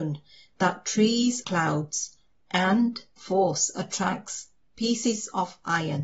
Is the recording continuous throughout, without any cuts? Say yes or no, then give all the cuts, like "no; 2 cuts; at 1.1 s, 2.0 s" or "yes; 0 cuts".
no; 2 cuts; at 1.4 s, 3.2 s